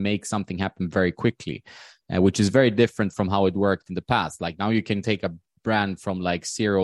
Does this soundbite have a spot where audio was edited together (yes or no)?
no